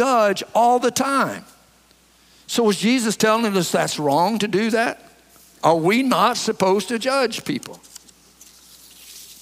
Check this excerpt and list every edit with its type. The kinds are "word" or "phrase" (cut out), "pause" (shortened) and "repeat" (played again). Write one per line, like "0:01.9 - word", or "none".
none